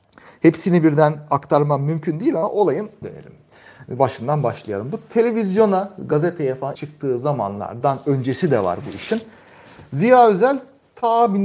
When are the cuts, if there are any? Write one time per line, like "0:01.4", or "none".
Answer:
0:03.0
0:06.7

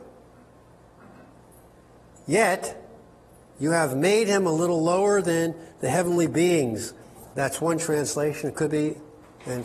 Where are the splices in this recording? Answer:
none

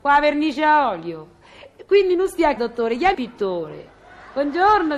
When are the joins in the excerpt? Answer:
0:02.6
0:03.1

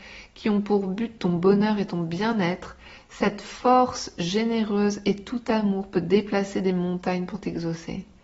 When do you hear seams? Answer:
none

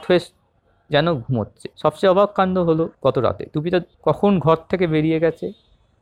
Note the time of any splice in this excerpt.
0:01.7
0:02.9
0:03.9

